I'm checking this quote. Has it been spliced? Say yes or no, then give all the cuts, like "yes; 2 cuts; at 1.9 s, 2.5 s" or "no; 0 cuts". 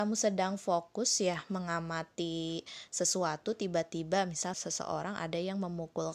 yes; 1 cut; at 4.5 s